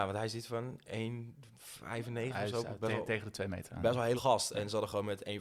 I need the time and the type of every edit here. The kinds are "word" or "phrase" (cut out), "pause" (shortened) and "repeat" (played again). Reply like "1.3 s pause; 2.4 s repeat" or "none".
4.2 s word